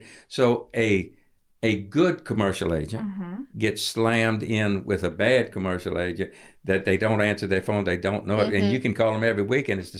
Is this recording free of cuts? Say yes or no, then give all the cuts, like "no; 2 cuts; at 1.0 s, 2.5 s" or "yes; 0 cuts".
no; 1 cut; at 3.5 s